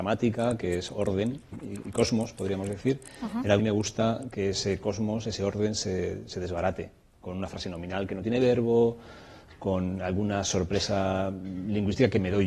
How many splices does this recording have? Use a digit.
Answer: 2